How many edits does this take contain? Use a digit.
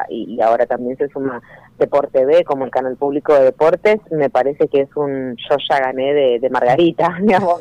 0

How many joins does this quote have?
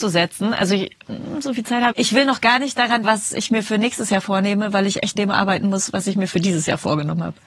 3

